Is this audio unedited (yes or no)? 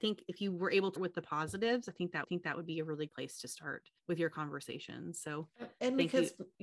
no